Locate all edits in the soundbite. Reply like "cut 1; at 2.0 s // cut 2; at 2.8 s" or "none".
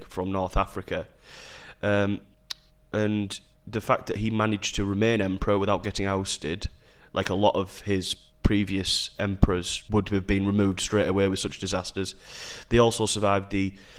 cut 1; at 9.9 s